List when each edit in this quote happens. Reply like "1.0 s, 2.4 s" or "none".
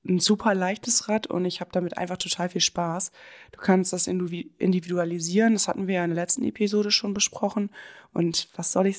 none